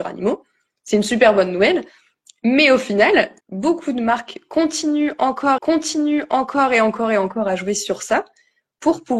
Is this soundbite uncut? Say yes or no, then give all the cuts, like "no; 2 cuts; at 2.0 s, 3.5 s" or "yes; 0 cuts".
no; 2 cuts; at 3.4 s, 5.6 s